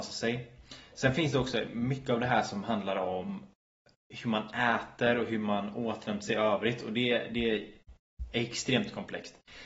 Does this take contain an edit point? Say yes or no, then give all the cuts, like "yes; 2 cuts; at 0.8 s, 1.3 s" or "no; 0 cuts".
no; 0 cuts